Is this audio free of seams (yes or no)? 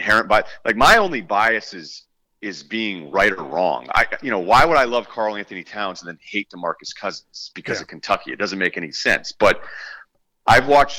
yes